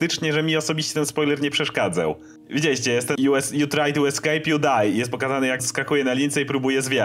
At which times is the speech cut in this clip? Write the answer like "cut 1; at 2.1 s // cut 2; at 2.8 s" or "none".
cut 1; at 3.1 s // cut 2; at 5.6 s